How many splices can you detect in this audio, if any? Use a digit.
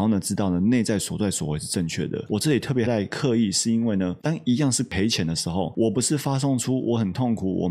1